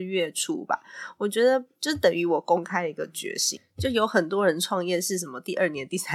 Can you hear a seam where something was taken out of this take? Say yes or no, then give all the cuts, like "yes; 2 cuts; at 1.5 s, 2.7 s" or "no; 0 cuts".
yes; 1 cut; at 1.7 s